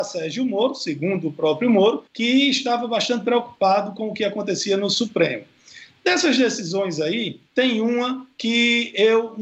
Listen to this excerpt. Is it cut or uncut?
cut